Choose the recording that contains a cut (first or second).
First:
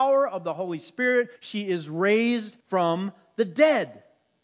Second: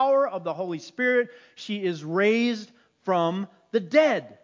first